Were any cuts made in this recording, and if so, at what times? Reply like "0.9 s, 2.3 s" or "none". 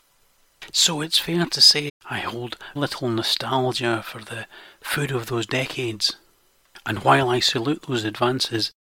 1.9 s, 2.8 s

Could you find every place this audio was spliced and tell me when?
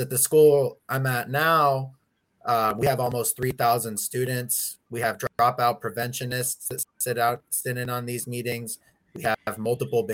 none

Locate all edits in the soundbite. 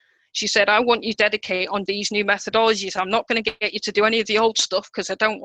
1.2 s, 1.9 s

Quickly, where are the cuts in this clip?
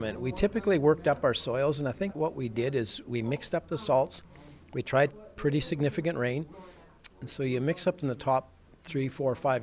2.1 s, 5.1 s, 8.0 s

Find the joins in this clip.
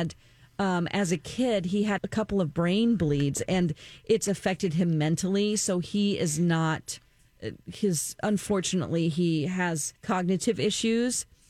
2.0 s, 10.0 s

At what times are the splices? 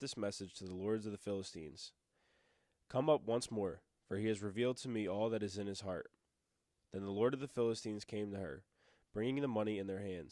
none

